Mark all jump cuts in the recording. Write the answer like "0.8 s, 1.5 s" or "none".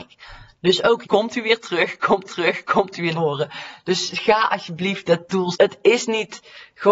1.0 s, 2.3 s, 3.1 s, 5.5 s